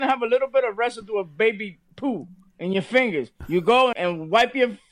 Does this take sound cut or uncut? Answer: cut